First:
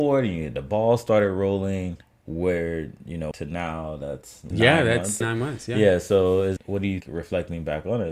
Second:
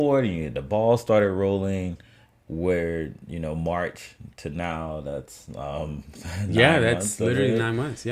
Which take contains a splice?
first; 6 cuts; at 2.0 s, 3.3 s, 4.5 s, 5.2 s, 6.6 s, 7.0 s

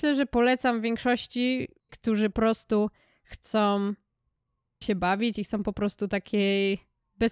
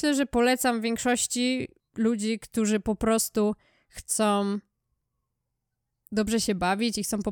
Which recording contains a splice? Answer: first; 3 cuts; at 1.9 s, 2.3 s, 4.8 s

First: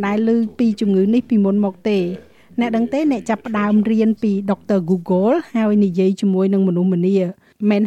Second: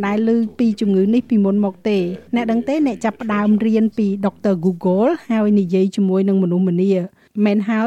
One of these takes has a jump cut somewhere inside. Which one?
second; 1 cut; at 2.3 s

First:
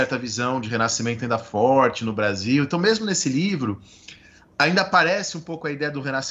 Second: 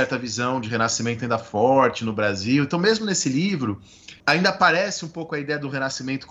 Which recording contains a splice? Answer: second; 1 cut; at 4.2 s

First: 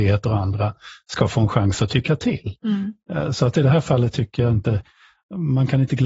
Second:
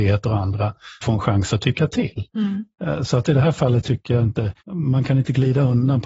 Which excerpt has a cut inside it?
second; 2 cuts; at 1.0 s, 4.6 s

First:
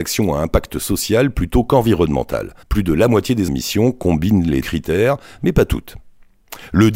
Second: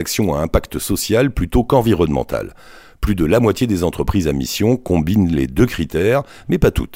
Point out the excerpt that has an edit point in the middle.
first; 3 cuts; at 2.6 s, 3.5 s, 4.6 s

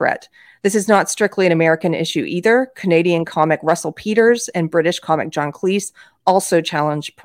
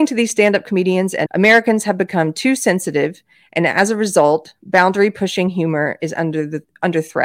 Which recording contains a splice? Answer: second; 1 cut; at 1.3 s

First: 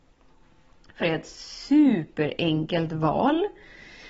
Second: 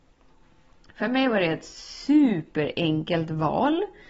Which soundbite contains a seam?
first; 1 cut; at 1.0 s

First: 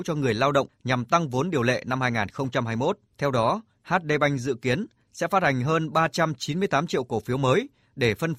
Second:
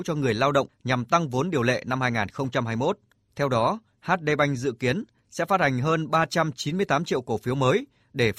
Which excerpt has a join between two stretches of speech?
first; 1 cut; at 3.1 s

